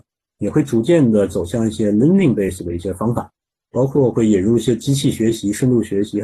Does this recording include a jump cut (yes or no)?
no